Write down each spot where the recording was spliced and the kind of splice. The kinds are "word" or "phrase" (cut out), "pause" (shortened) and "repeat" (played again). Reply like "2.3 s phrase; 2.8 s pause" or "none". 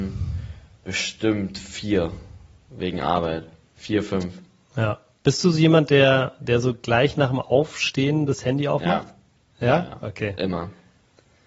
none